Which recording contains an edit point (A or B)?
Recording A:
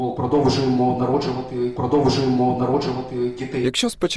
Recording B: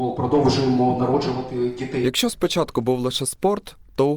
A